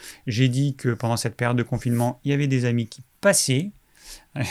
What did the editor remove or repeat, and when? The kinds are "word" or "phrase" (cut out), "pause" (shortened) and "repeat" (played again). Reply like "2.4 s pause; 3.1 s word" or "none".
none